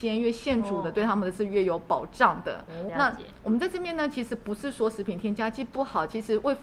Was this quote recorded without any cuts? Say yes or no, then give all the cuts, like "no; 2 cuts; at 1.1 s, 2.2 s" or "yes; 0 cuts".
no; 1 cut; at 2.9 s